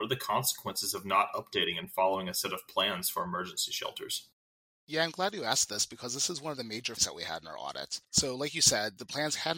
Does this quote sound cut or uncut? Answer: cut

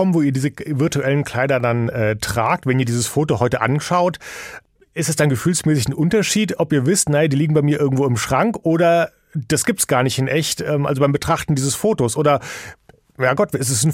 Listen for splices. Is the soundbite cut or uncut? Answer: uncut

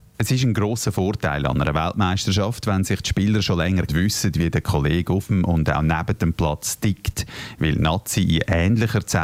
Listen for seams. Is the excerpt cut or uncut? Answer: cut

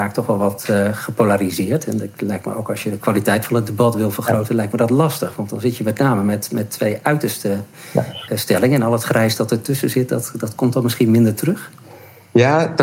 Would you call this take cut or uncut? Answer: uncut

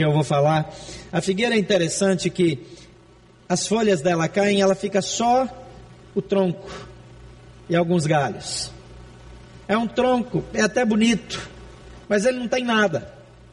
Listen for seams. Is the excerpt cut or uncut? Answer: uncut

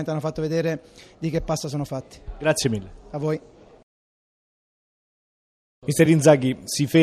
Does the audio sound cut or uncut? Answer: uncut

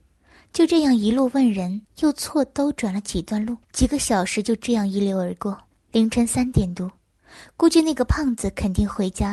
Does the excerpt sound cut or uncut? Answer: cut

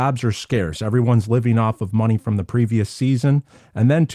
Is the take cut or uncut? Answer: uncut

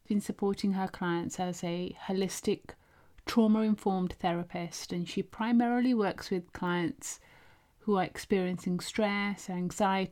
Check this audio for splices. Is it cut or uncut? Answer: uncut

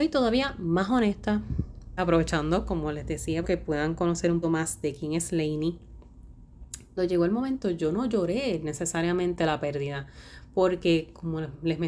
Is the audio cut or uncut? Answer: cut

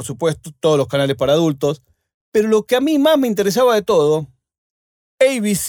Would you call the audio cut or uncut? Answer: uncut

